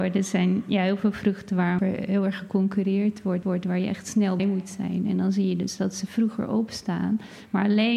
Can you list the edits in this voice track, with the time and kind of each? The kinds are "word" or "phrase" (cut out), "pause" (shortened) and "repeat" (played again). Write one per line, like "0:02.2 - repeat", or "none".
0:01.8 - phrase
0:03.4 - repeat
0:04.4 - word